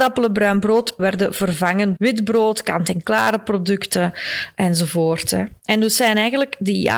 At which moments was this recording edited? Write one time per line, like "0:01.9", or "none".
0:01.0
0:02.0

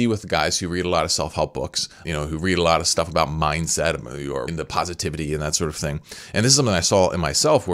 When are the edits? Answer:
0:02.0
0:04.5

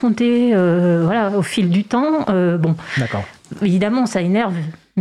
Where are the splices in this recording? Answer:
none

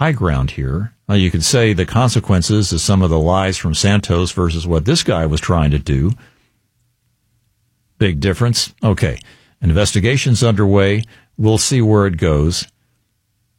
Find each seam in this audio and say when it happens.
none

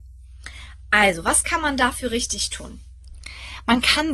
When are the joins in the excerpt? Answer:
none

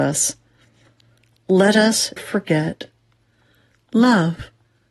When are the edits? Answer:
0:02.2

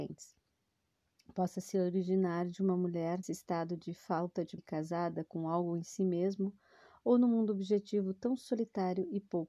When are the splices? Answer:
0:03.2
0:04.6

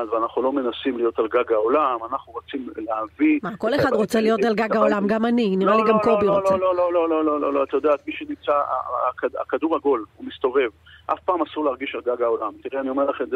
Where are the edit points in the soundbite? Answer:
none

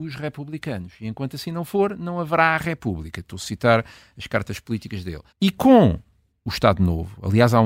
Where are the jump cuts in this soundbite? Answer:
0:05.3

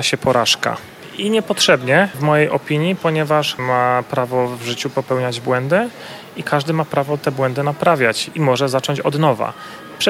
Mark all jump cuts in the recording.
0:02.1
0:03.6

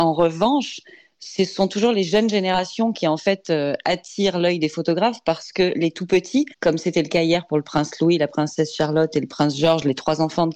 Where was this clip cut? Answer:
0:06.5

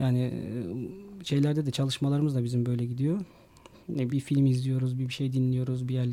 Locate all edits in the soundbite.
0:04.1

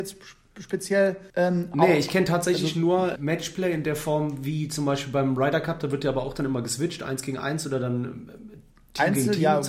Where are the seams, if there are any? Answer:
0:01.3
0:03.2

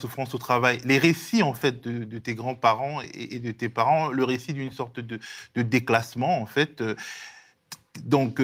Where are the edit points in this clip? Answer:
none

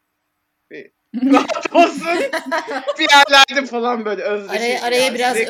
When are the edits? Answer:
0:03.0
0:03.6

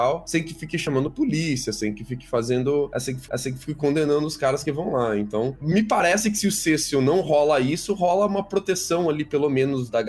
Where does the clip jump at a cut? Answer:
0:03.3
0:05.6

